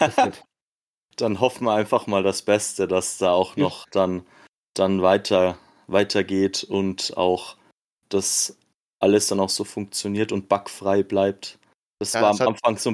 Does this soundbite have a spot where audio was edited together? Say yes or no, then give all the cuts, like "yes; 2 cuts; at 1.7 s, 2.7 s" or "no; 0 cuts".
no; 0 cuts